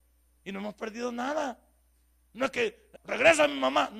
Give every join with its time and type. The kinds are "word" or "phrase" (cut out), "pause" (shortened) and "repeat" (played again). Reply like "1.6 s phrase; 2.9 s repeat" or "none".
3.0 s word